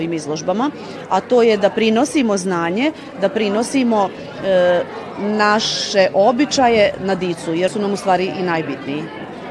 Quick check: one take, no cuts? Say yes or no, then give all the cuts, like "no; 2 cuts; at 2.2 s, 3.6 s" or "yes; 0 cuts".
no; 1 cut; at 7.7 s